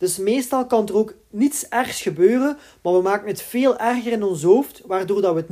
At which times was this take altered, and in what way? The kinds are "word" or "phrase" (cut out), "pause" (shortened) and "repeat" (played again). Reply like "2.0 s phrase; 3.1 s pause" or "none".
none